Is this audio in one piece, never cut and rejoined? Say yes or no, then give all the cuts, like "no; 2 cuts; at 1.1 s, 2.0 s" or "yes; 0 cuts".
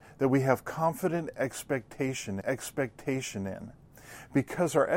no; 1 cut; at 2.4 s